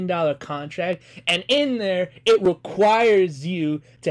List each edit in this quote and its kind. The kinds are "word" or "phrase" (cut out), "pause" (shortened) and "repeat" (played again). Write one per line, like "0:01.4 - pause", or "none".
none